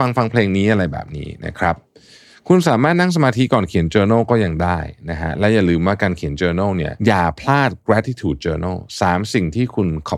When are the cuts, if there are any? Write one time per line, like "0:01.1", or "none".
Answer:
0:07.0